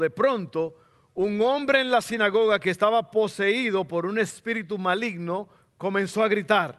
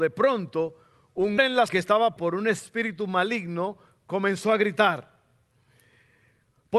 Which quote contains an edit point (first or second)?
second